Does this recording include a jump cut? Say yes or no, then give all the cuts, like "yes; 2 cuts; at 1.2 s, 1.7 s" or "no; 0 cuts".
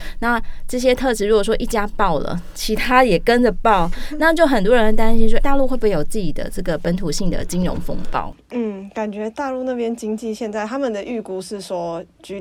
yes; 1 cut; at 5.4 s